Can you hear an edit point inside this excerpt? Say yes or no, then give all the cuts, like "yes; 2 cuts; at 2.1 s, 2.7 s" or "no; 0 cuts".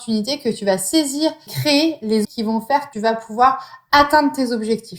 yes; 3 cuts; at 1.5 s, 2.2 s, 2.9 s